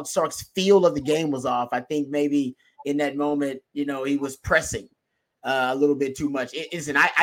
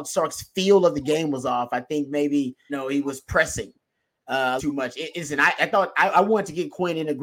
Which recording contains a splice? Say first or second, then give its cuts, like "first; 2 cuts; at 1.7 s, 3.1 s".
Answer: second; 3 cuts; at 2.7 s, 4.6 s, 5.6 s